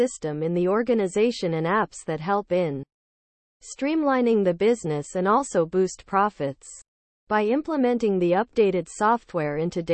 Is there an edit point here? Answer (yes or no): no